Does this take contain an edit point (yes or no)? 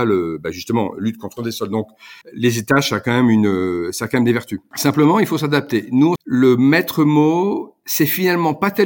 yes